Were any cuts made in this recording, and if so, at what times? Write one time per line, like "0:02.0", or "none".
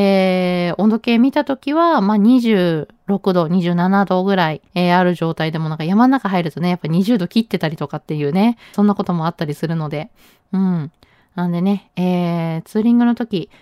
0:04.7
0:08.7